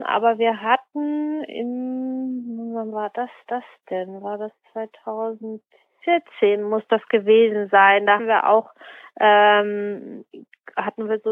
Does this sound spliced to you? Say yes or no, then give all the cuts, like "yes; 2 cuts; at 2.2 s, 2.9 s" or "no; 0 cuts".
yes; 2 cuts; at 3.5 s, 8.2 s